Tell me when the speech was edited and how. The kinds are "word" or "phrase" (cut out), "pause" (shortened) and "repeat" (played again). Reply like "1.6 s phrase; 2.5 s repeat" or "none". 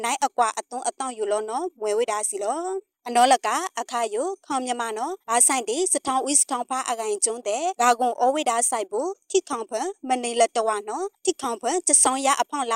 5.2 s pause